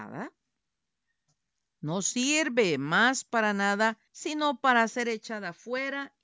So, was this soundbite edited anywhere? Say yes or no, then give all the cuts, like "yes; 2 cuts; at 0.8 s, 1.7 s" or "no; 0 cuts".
yes; 1 cut; at 4.1 s